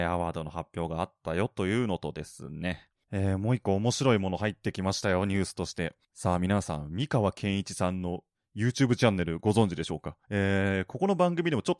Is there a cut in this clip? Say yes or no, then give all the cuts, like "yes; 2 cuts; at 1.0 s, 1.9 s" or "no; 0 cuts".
yes; 2 cuts; at 8.3 s, 10.2 s